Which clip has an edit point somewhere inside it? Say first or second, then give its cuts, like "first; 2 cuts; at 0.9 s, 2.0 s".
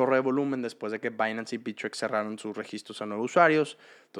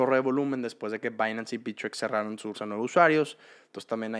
second; 1 cut; at 2.5 s